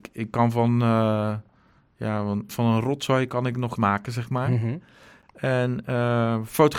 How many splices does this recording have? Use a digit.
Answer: 2